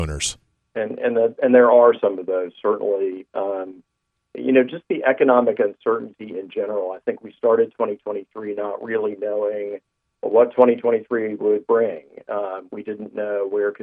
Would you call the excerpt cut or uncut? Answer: uncut